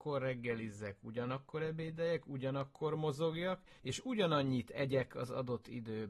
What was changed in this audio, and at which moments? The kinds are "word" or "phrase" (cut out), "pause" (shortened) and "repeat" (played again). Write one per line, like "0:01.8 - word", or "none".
0:03.8 - pause